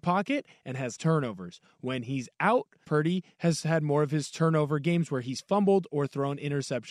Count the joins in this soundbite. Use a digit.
2